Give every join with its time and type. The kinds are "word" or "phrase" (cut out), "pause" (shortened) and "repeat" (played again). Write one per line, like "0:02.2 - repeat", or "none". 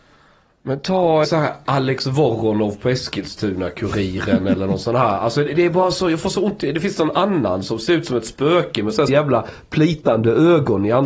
0:01.2 - word
0:09.1 - word